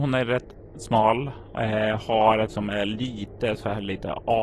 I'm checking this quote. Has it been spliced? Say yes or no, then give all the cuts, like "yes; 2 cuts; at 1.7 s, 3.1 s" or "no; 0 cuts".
yes; 1 cut; at 2.5 s